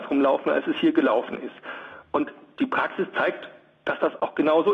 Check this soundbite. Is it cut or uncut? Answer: uncut